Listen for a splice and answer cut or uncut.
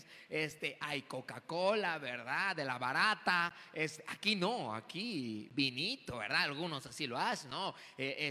uncut